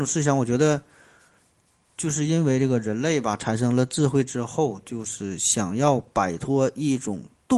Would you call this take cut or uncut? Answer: uncut